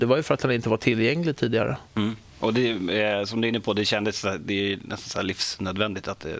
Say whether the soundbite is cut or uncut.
cut